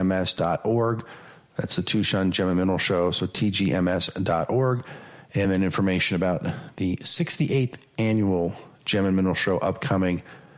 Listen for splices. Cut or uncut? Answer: uncut